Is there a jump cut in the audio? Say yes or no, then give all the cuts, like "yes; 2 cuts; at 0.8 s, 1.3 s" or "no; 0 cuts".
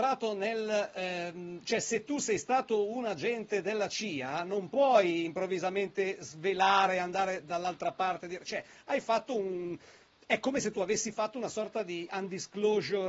no; 0 cuts